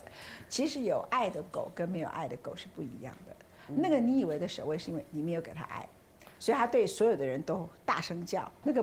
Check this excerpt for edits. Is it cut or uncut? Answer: uncut